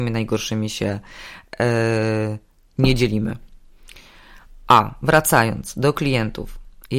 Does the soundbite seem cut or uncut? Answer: uncut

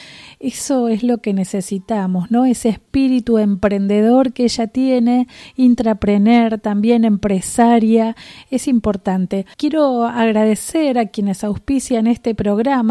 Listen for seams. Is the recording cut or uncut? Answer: cut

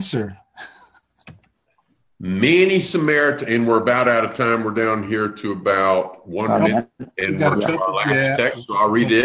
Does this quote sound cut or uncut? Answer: uncut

